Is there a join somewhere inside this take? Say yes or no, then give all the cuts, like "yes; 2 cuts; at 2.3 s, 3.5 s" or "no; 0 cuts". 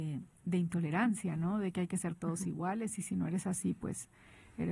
no; 0 cuts